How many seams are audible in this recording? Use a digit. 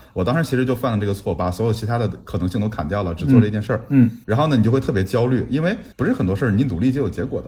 2